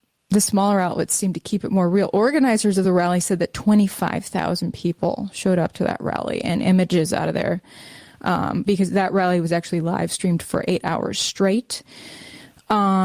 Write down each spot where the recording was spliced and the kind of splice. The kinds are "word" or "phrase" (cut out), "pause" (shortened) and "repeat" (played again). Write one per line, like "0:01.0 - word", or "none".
none